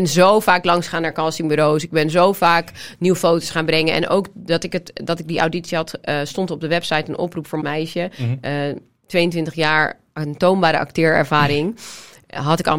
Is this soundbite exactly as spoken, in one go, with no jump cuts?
no; 1 cut; at 7.6 s

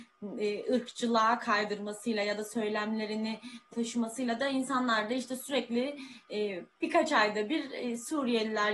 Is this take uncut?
no; 1 cut; at 3.7 s

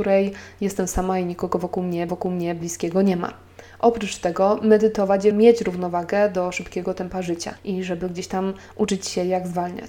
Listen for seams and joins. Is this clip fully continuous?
no; 3 cuts; at 2.1 s, 5.3 s, 7.6 s

